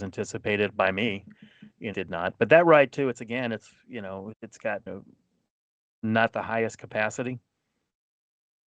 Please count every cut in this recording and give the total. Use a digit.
3